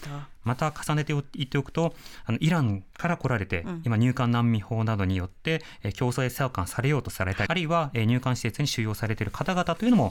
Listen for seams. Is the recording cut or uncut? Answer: cut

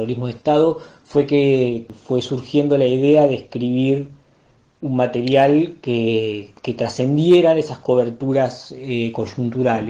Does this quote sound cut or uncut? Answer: uncut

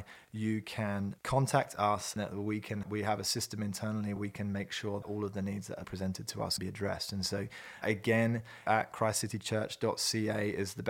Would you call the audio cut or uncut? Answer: cut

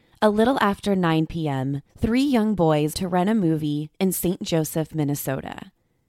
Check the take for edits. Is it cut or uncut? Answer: cut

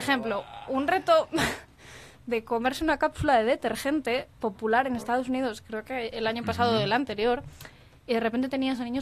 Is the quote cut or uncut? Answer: uncut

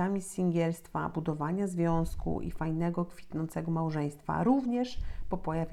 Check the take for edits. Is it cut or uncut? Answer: uncut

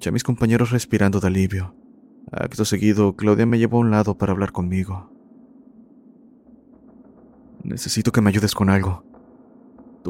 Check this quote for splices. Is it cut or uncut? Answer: uncut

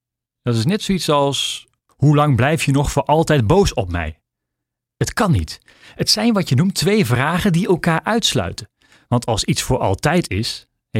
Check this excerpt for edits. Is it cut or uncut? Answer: uncut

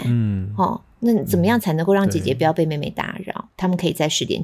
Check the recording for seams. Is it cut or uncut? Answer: cut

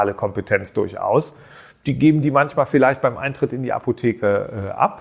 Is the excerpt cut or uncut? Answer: uncut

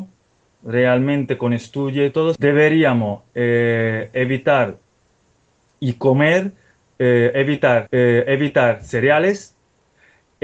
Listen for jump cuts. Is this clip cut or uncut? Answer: cut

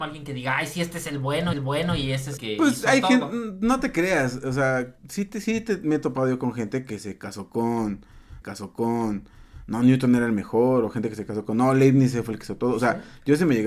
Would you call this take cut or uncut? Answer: cut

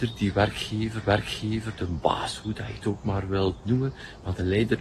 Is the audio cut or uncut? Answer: cut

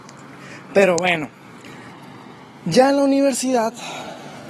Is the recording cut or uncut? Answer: uncut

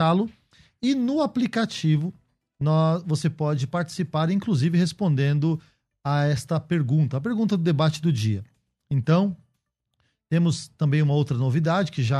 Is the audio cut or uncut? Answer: uncut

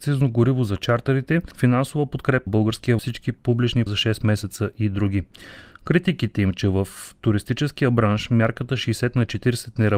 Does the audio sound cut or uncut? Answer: cut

